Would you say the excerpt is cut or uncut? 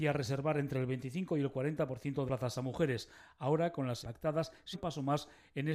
cut